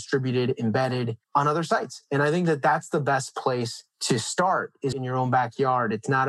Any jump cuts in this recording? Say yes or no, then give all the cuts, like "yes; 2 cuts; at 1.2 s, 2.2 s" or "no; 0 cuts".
yes; 3 cuts; at 1.2 s, 3.9 s, 4.9 s